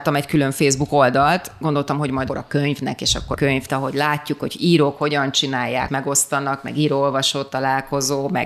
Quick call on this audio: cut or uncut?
cut